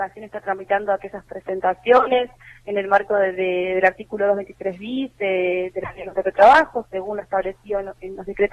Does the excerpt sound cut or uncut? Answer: uncut